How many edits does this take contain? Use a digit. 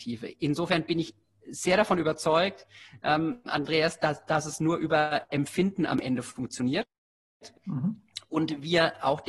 0